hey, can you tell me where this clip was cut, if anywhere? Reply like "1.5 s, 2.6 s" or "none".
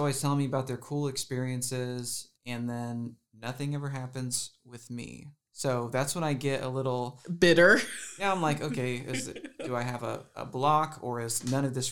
2.3 s, 3.2 s, 5.4 s